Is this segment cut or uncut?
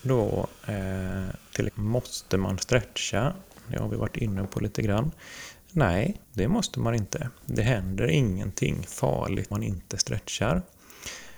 cut